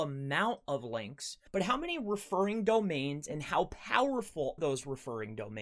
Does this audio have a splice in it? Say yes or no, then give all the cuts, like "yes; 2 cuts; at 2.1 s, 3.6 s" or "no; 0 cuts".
yes; 2 cuts; at 1.5 s, 4.6 s